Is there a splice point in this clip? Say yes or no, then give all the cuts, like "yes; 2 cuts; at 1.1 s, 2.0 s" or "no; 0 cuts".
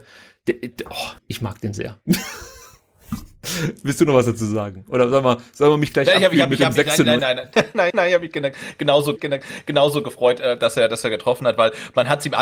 yes; 5 cuts; at 1.2 s, 7.2 s, 7.5 s, 7.9 s, 9.2 s